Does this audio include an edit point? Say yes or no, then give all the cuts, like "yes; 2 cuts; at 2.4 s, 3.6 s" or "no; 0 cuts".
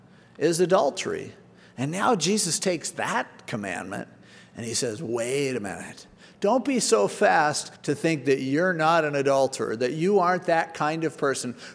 yes; 1 cut; at 7.8 s